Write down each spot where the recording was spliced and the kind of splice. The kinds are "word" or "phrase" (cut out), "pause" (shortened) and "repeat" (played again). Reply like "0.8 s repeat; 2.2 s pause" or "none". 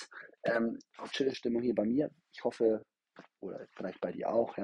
1.1 s phrase